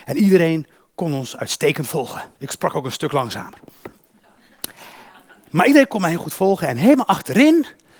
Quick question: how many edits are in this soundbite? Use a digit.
1